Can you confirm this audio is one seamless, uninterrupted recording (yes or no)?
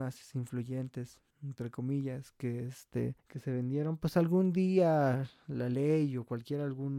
no